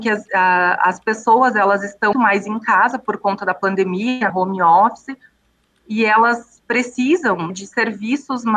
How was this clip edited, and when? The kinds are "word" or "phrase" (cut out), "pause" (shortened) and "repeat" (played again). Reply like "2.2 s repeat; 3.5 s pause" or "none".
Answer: 2.1 s word; 4.3 s word; 7.5 s word